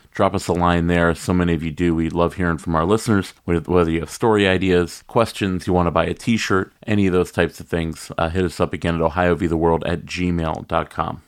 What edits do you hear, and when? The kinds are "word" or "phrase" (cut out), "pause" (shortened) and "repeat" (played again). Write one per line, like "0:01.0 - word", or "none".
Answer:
0:03.4 - pause
0:06.8 - pause